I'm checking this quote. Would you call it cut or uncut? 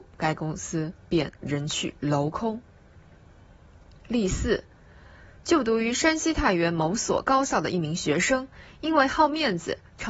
uncut